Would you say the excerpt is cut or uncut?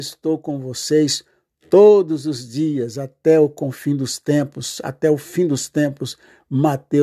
uncut